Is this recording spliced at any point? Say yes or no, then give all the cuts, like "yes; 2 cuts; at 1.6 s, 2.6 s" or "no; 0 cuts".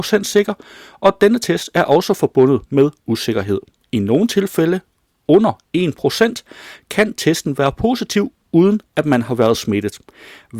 no; 0 cuts